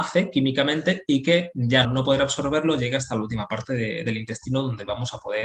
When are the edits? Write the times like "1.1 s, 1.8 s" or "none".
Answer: 1.8 s